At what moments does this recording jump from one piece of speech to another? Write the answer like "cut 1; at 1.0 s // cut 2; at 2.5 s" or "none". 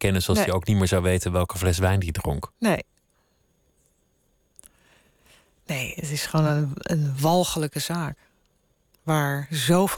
none